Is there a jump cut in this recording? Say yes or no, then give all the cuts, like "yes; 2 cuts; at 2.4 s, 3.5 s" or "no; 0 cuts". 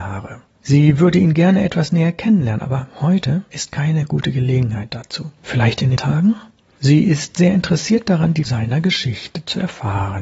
yes; 2 cuts; at 6.0 s, 8.5 s